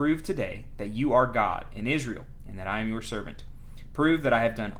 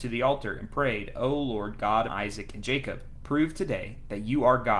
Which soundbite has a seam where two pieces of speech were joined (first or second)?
second